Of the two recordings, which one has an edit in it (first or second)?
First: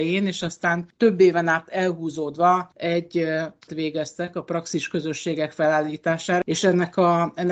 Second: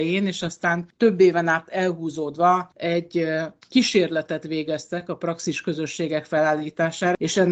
first